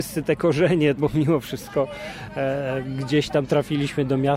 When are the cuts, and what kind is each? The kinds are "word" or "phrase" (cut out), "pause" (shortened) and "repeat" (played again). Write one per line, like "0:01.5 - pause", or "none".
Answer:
0:01.0 - word

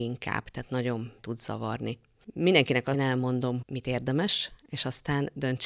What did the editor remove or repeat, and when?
0:01.2 - word
0:02.9 - phrase
0:03.6 - word

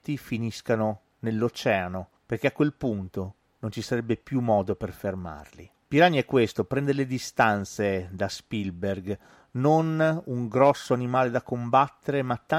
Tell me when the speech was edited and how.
none

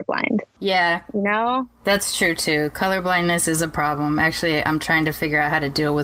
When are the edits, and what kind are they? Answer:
none

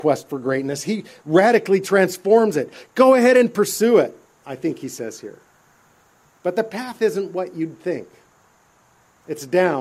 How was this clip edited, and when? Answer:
none

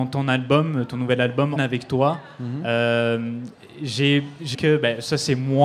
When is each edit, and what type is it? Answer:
0:01.6 - phrase
0:04.5 - word

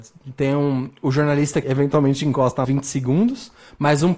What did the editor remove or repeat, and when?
0:01.6 - word
0:02.6 - phrase

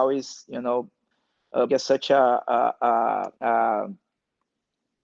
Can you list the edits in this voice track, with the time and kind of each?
0:01.7 - word
0:03.4 - pause

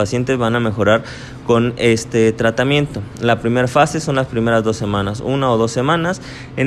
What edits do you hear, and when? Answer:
none

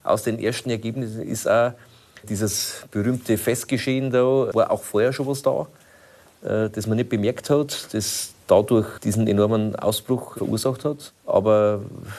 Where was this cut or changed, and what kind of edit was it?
0:02.2 - word
0:04.5 - word
0:09.0 - word

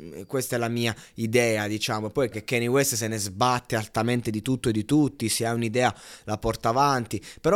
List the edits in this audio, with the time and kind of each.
0:02.3 - word

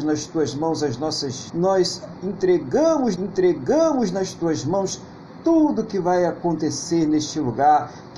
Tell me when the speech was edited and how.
0:01.5 - word
0:03.2 - repeat

